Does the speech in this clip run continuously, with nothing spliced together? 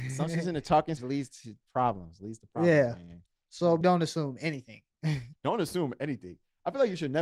no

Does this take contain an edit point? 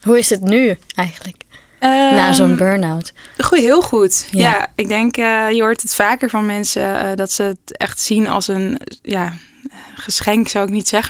no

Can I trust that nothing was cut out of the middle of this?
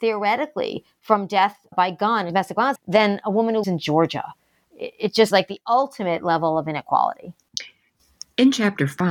no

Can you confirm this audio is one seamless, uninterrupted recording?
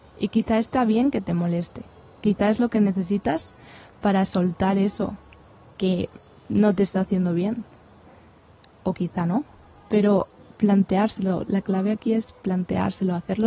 yes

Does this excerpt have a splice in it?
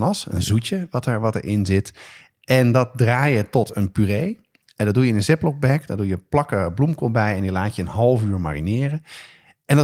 no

